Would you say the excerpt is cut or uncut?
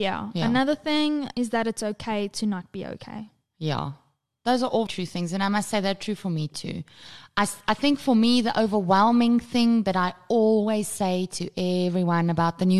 cut